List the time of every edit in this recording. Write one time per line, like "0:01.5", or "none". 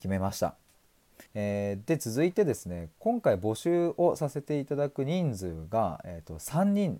0:01.3